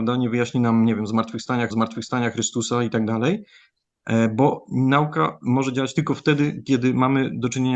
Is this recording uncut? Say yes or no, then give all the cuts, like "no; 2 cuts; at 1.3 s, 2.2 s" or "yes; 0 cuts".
no; 1 cut; at 1.7 s